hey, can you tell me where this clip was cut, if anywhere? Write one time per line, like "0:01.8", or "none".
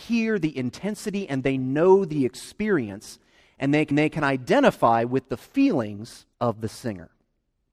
0:03.9
0:06.3